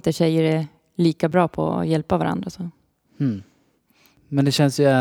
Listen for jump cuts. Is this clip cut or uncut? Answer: uncut